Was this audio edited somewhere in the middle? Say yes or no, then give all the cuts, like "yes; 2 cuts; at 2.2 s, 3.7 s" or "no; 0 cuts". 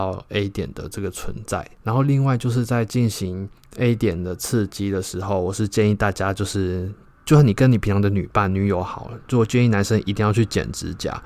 no; 0 cuts